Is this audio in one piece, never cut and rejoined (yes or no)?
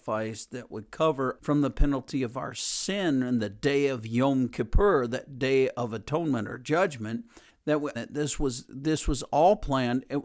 no